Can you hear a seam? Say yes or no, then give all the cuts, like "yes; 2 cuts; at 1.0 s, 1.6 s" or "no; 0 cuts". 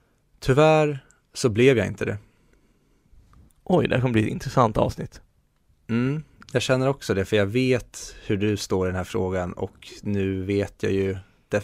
no; 0 cuts